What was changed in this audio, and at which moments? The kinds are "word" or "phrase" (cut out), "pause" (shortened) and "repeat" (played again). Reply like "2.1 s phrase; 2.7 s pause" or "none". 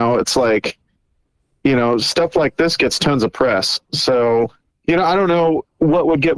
4.7 s pause